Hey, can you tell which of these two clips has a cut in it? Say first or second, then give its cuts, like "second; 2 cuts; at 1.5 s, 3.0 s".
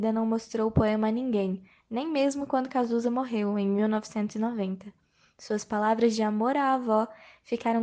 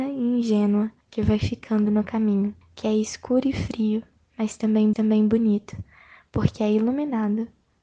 second; 3 cuts; at 1.0 s, 2.6 s, 4.9 s